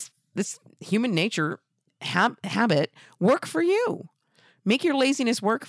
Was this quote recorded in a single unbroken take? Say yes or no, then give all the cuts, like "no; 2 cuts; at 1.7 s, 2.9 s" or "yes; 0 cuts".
yes; 0 cuts